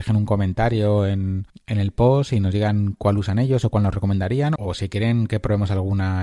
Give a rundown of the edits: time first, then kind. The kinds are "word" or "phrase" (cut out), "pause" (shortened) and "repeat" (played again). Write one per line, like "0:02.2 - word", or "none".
0:01.5 - pause
0:04.6 - word